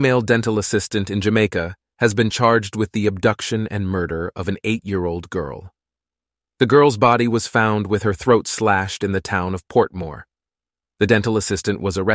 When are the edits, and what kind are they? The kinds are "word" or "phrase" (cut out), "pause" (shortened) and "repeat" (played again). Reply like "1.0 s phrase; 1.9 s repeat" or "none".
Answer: none